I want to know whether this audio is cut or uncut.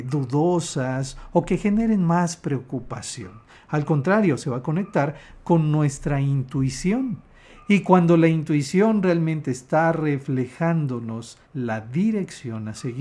cut